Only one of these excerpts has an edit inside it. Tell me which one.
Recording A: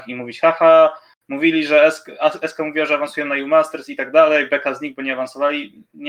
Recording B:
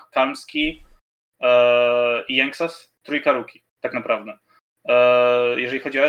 B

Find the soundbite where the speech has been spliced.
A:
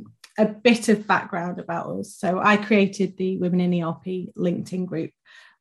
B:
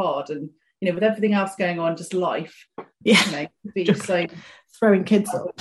B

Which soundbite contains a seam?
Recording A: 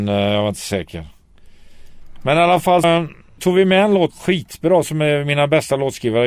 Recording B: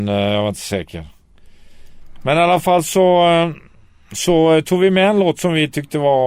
A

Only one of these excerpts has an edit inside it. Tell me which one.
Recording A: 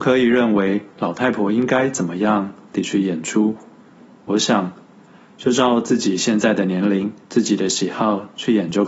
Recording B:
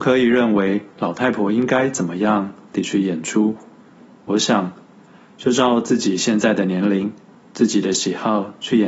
A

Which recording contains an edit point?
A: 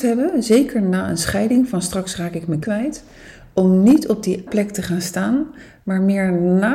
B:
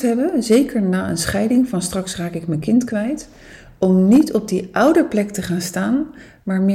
A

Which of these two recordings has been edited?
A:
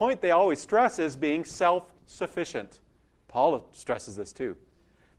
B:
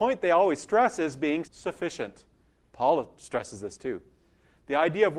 B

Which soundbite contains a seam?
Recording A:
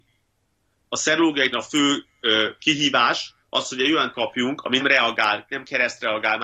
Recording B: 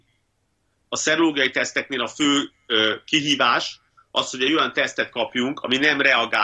A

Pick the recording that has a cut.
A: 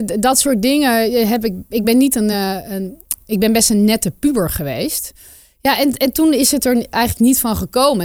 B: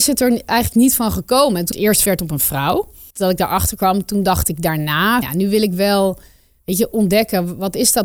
B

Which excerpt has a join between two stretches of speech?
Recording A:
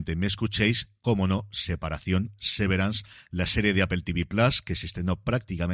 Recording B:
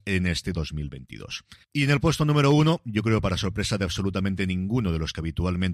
B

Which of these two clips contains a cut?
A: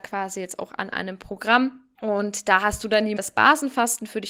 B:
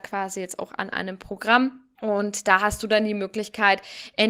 A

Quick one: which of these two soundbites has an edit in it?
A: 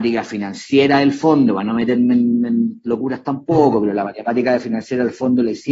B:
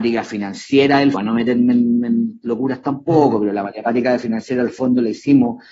B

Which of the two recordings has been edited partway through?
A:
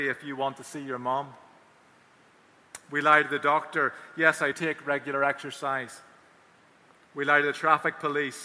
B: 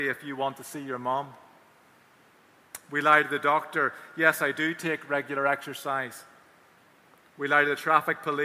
A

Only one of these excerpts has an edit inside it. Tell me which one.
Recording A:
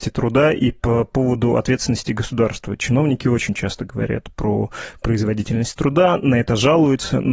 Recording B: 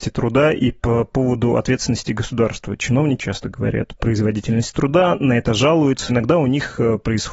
B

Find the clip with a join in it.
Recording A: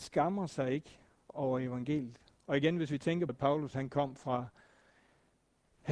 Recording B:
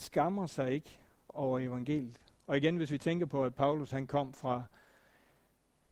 A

